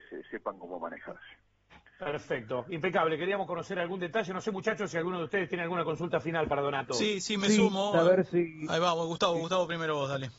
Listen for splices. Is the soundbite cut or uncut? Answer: cut